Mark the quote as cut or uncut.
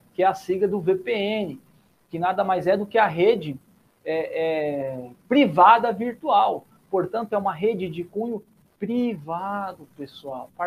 uncut